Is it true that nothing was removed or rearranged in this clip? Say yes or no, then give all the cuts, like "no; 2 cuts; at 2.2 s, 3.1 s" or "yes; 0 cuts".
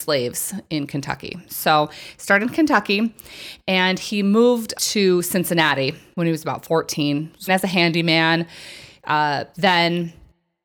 no; 4 cuts; at 2.4 s, 4.7 s, 7.5 s, 9.5 s